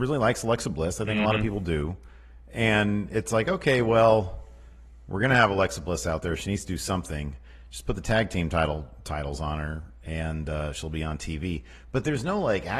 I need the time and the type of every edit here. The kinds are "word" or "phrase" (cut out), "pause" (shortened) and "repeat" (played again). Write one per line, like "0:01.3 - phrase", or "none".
none